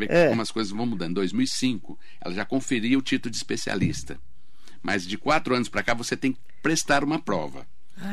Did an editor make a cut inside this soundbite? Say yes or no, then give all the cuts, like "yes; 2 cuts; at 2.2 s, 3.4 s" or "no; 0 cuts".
no; 0 cuts